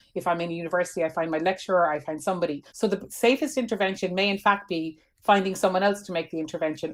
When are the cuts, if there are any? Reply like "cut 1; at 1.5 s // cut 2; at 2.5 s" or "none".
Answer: cut 1; at 2.7 s